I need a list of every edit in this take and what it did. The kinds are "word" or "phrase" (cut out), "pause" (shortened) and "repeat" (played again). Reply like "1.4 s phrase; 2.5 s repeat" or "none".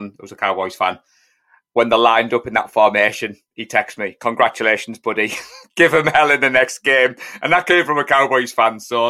none